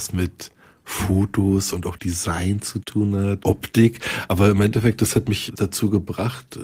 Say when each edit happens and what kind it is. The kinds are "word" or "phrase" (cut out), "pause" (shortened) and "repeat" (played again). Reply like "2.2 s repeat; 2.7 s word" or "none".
3.4 s word; 5.5 s word

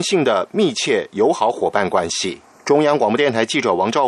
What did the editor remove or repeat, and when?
2.6 s pause

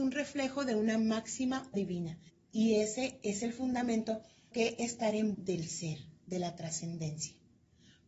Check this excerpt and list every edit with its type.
1.7 s word; 2.3 s pause; 4.5 s word; 5.3 s word

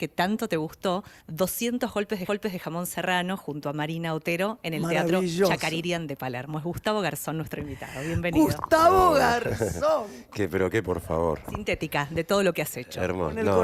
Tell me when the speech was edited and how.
1.2 s pause; 2.3 s repeat; 10.8 s word

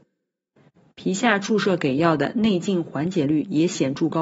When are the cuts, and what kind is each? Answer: none

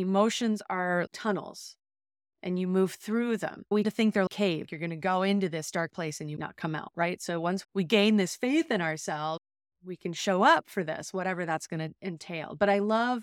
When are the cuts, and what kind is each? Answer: 1.1 s word; 3.8 s word; 4.3 s word; 5.9 s word; 6.4 s word; 7.6 s word

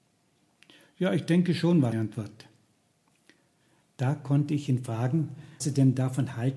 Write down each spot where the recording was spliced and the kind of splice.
1.9 s word; 5.6 s word

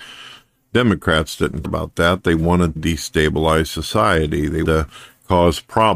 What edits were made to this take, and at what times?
1.6 s word; 2.8 s word; 4.6 s word

